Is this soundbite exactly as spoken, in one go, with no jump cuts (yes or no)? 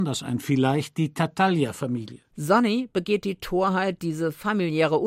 no